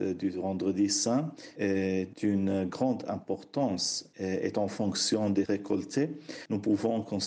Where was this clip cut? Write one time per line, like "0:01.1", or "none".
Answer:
0:05.5